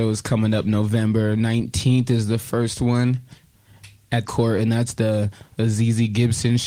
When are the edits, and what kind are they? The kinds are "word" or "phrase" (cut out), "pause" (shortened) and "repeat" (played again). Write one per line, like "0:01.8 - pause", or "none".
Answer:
0:04.2 - phrase